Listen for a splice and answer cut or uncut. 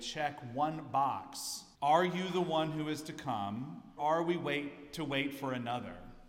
cut